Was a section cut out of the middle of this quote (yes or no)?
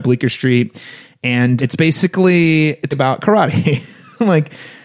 yes